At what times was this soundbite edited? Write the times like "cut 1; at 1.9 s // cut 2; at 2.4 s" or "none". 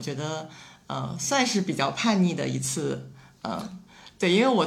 none